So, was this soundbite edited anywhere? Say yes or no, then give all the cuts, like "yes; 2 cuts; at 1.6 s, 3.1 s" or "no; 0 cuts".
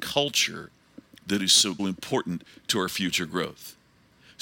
yes; 1 cut; at 1.8 s